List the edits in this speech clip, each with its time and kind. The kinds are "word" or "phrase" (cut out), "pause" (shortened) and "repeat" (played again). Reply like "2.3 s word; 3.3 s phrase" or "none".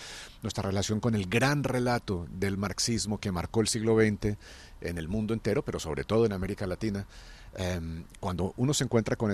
none